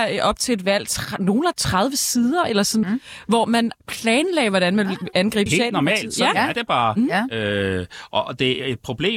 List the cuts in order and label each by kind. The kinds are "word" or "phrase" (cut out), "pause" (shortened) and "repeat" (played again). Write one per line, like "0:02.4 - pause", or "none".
0:01.5 - word
0:02.8 - word
0:05.5 - phrase